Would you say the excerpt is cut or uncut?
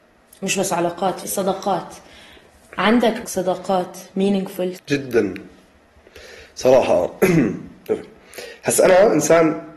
cut